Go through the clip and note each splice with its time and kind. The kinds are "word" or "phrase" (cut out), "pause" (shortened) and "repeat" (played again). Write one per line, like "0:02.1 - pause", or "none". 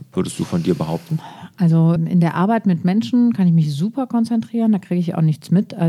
0:02.0 - word